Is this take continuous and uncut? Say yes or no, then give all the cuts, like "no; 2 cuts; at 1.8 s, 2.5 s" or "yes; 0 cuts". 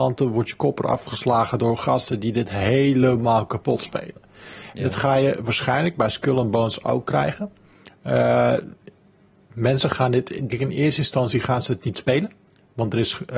no; 1 cut; at 10.5 s